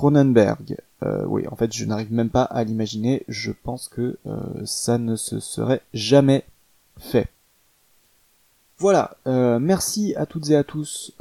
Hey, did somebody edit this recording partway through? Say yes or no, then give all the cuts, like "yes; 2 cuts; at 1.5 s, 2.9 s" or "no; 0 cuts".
no; 0 cuts